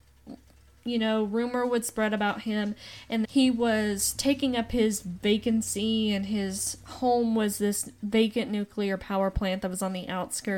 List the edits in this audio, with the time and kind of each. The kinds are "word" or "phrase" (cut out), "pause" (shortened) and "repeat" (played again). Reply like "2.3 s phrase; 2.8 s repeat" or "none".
3.2 s phrase